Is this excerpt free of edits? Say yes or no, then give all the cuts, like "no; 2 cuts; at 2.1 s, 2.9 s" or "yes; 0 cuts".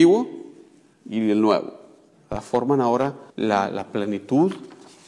no; 1 cut; at 3.3 s